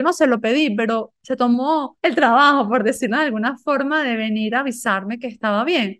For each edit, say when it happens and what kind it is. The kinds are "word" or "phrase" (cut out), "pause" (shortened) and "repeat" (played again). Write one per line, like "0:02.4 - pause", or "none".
0:02.0 - pause